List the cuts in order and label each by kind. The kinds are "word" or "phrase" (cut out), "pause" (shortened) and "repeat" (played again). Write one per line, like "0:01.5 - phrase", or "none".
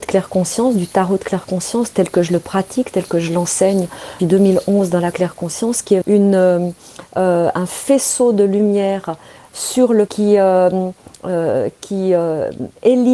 0:04.2 - word
0:05.1 - word
0:06.0 - word
0:10.1 - word